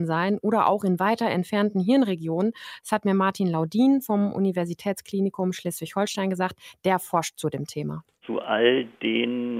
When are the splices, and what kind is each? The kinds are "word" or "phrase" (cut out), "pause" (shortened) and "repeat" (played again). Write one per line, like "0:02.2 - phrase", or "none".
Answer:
none